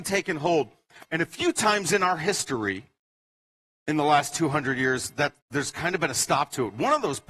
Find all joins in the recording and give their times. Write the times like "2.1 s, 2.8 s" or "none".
5.4 s